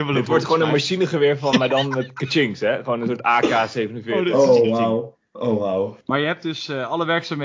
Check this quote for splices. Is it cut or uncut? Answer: cut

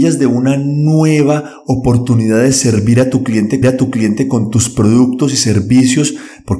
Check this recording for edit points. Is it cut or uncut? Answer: cut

